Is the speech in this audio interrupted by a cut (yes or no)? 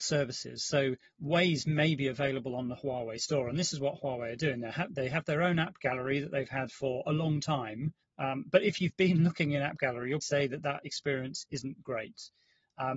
yes